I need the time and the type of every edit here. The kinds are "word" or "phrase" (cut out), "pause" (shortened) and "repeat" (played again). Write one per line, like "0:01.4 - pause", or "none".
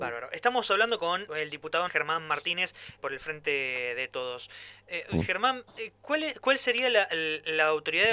0:01.3 - word
0:01.9 - word
0:03.0 - word